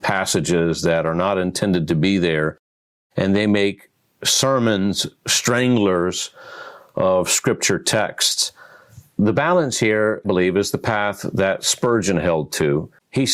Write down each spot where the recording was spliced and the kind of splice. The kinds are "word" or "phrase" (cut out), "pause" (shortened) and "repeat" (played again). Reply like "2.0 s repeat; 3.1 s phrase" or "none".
10.2 s word